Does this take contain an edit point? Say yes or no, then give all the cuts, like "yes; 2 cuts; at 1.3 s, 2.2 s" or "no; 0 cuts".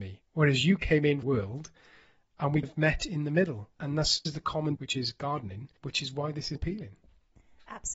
yes; 7 cuts; at 1.2 s, 2.6 s, 3.8 s, 4.2 s, 4.7 s, 5.8 s, 6.6 s